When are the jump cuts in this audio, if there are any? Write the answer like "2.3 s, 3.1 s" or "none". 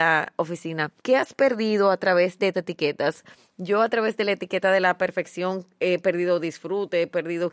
1.0 s, 2.5 s